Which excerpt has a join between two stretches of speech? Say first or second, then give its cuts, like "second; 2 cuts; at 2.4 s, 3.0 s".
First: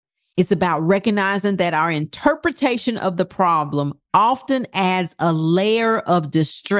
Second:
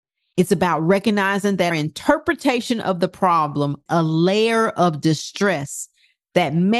second; 2 cuts; at 1.7 s, 3.9 s